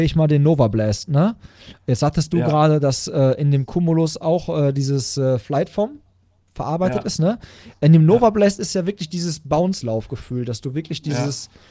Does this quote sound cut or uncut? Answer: uncut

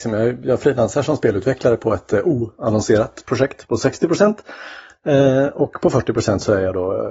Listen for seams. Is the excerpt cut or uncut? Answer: uncut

